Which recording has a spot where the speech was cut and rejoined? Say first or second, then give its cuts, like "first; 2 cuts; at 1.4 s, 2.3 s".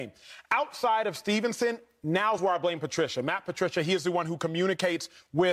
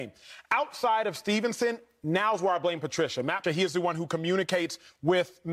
second; 1 cut; at 3.4 s